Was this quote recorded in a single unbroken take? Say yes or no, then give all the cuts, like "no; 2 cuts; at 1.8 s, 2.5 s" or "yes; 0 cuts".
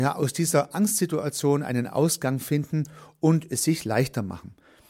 yes; 0 cuts